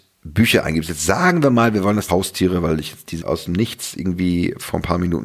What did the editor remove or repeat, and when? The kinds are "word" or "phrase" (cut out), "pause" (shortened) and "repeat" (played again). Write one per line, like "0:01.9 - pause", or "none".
0:02.1 - word
0:03.2 - word